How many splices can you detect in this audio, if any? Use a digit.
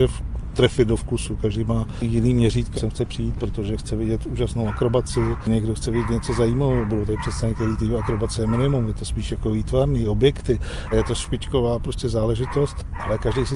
2